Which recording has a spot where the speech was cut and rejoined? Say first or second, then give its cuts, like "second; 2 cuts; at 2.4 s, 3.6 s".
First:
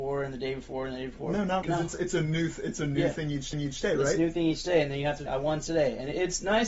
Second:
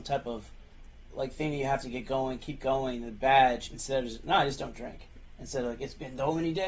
first; 3 cuts; at 1.6 s, 3.5 s, 5.3 s